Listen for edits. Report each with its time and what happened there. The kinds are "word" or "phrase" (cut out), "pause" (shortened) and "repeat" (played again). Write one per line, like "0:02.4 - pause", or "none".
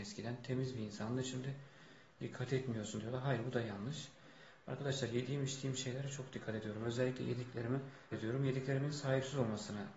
0:08.1 - word